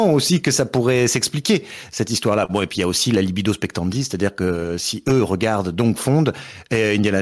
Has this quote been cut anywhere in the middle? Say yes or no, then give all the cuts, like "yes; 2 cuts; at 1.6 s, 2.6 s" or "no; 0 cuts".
no; 0 cuts